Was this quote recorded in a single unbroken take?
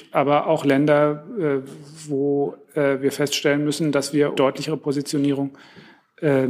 no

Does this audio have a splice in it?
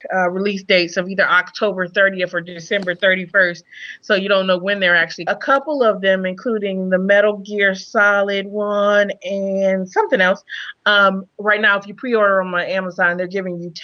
yes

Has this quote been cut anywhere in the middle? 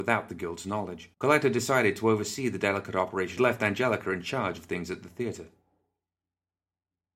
yes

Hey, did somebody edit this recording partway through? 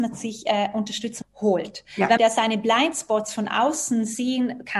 yes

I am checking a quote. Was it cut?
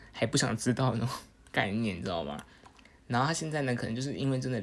no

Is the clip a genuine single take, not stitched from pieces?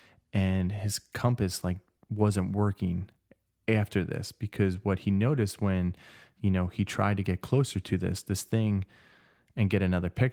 yes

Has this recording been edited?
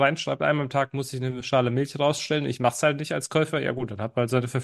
no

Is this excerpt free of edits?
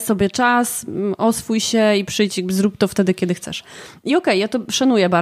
yes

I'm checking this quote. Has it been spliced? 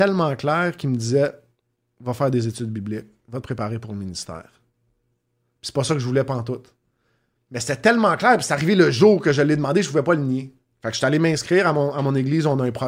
yes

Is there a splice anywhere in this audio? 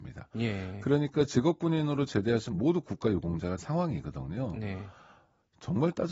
yes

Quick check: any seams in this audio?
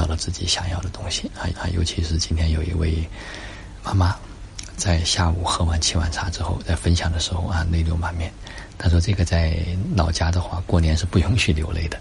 yes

